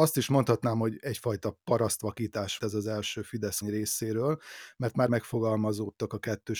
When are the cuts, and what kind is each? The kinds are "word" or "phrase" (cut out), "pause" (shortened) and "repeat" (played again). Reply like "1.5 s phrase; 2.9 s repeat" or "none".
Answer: 2.6 s word; 3.6 s word; 5.1 s word